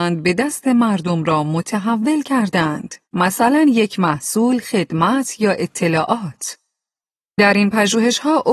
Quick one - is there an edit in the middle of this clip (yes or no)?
yes